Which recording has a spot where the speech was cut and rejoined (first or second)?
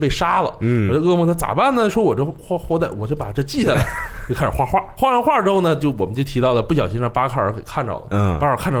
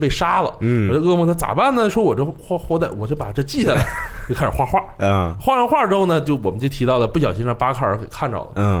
first